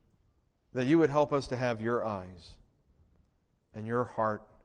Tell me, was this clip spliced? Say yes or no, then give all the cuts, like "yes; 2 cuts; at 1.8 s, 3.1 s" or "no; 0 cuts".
no; 0 cuts